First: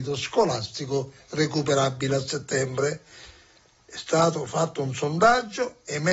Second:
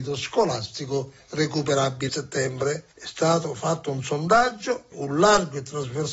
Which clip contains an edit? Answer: second; 3 cuts; at 2.1 s, 2.9 s, 4.9 s

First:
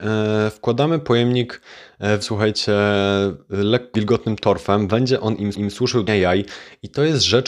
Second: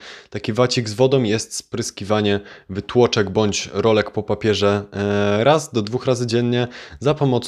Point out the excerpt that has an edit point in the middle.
first; 4 cuts; at 2.2 s, 3.9 s, 5.5 s, 6.1 s

